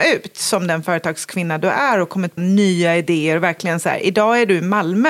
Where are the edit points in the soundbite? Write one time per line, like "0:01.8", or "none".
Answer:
0:02.4